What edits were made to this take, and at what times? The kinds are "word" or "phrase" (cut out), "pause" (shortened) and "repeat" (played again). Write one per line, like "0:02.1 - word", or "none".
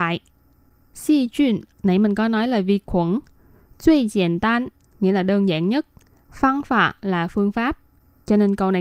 none